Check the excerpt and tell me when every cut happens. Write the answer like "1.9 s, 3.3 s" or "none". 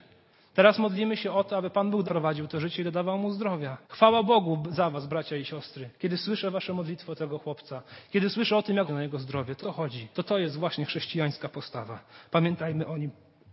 2.0 s, 3.8 s, 6.0 s, 8.9 s, 9.6 s, 10.1 s